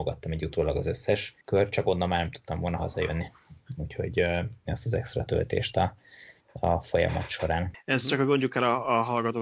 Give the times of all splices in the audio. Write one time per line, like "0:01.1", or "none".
0:01.4
0:04.7
0:06.4